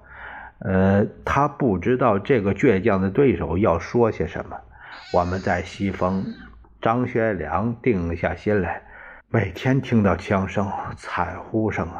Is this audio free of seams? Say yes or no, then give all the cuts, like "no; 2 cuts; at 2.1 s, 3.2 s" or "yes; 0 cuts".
no; 2 cuts; at 6.6 s, 9.2 s